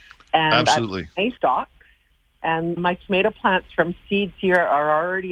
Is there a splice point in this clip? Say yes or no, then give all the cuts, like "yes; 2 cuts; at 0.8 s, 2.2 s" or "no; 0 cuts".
yes; 3 cuts; at 1.4 s, 2.8 s, 4.3 s